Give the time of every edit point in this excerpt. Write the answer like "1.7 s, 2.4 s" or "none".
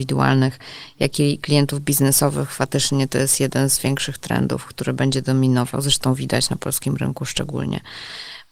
none